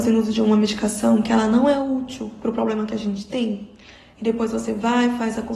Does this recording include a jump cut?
no; 0 cuts

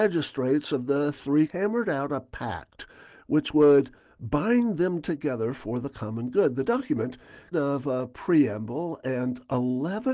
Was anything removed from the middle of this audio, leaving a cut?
yes; 2 cuts; at 1.5 s, 7.5 s

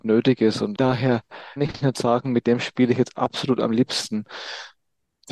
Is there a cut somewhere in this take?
yes; 1 cut; at 1.6 s

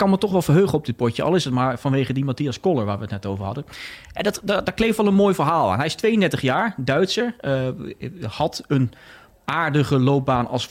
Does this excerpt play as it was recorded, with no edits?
yes; 0 cuts

